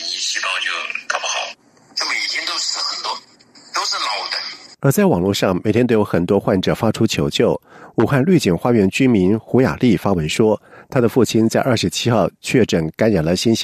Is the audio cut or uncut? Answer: uncut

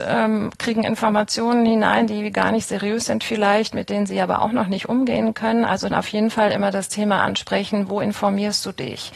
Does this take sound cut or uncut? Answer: cut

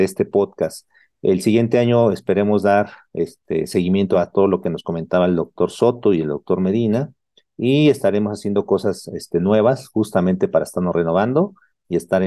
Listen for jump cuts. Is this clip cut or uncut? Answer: uncut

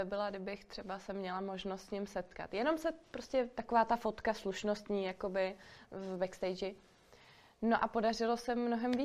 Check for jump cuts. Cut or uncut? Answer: uncut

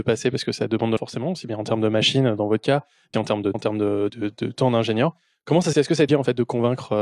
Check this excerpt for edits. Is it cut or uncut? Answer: cut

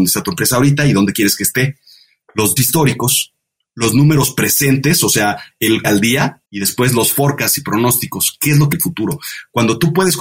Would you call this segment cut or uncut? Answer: cut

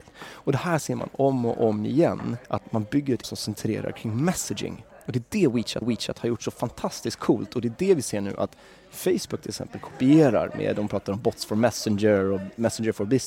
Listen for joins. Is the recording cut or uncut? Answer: cut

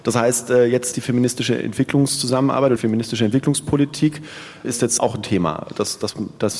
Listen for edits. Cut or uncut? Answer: cut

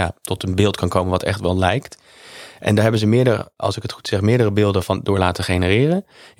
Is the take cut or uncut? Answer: uncut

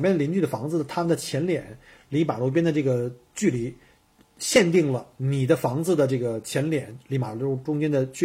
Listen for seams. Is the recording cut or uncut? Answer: uncut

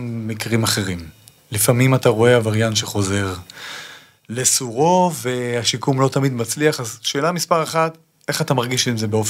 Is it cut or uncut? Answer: uncut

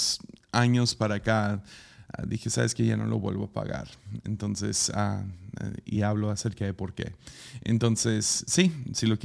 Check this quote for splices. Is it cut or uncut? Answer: uncut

